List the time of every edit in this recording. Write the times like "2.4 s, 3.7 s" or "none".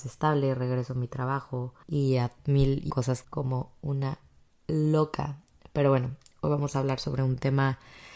1.8 s, 2.9 s, 3.2 s